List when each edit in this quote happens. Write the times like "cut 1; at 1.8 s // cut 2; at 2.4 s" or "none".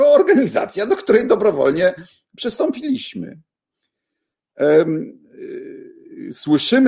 none